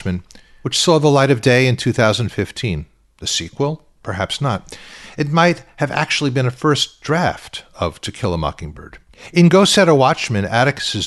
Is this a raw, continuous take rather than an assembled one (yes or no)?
yes